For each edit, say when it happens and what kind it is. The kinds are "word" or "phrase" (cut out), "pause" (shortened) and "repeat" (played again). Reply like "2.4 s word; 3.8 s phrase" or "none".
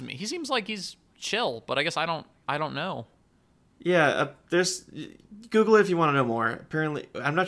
none

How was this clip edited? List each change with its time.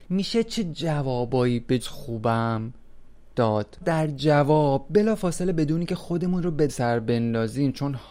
1.8 s word; 3.8 s phrase; 6.7 s word

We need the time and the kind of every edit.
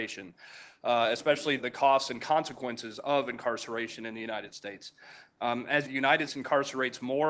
1.6 s word; 5.8 s phrase; 6.3 s word

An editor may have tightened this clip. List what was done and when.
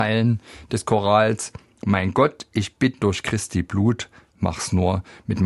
none

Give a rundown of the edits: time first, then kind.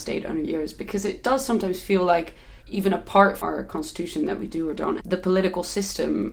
2.6 s pause; 3.4 s word; 5.0 s word

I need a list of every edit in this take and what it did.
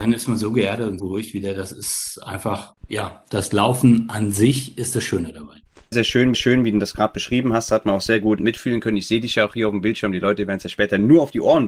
1.0 s word; 2.8 s pause; 5.9 s word; 6.3 s repeat; 8.4 s word

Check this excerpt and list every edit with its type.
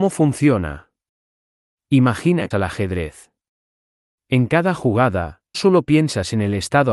2.5 s phrase; 5.5 s word

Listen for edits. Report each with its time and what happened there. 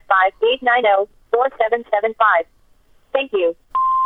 none

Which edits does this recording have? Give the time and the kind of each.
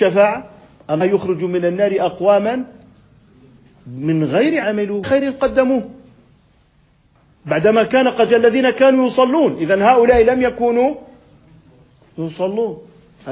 1.0 s word; 4.6 s word; 5.0 s word; 8.3 s word

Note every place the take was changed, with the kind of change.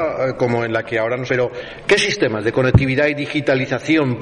1.3 s word

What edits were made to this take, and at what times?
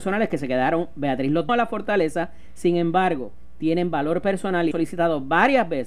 1.5 s word; 4.7 s phrase

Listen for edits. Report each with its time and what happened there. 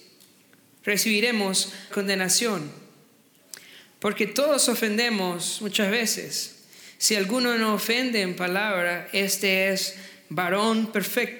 1.9 s word

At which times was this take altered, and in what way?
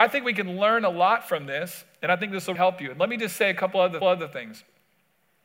2.5 s word; 4.0 s repeat

